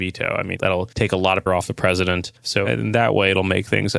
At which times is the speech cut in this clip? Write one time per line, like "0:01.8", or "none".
0:00.9
0:01.5
0:02.4